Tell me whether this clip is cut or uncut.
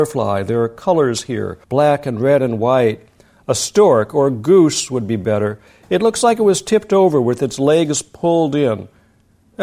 cut